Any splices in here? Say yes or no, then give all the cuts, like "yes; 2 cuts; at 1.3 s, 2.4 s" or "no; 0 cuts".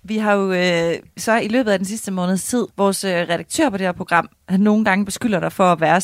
yes; 1 cut; at 2.7 s